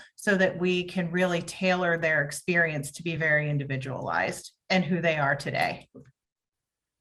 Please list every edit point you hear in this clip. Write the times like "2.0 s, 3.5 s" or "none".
none